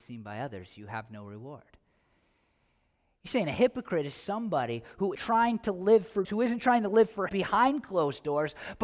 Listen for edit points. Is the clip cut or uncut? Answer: cut